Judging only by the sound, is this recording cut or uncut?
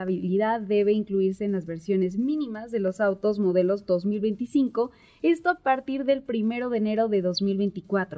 uncut